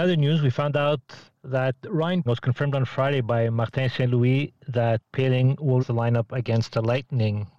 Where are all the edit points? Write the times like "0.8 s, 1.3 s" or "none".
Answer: 2.3 s, 5.1 s, 5.8 s